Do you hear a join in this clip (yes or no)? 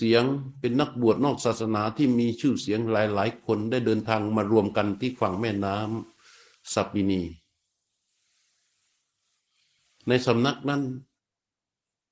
no